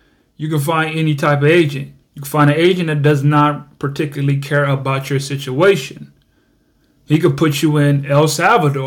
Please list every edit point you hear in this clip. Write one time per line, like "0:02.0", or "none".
0:02.0

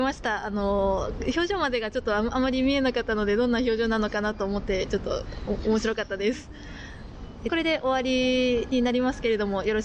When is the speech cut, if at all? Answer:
0:07.5

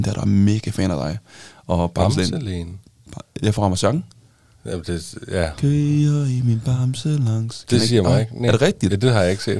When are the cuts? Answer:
none

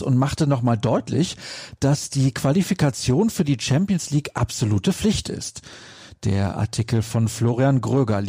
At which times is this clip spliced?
none

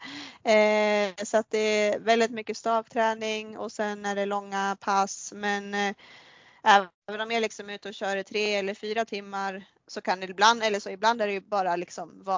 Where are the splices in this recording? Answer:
none

